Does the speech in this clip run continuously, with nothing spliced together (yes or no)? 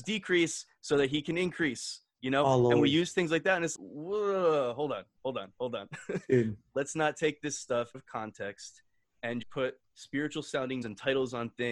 no